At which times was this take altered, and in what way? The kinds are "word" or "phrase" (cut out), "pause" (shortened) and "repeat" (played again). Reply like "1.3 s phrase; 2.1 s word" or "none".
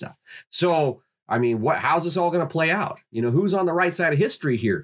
none